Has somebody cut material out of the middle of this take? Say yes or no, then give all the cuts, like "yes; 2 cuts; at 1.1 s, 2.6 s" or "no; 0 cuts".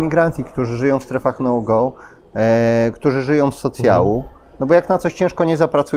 no; 0 cuts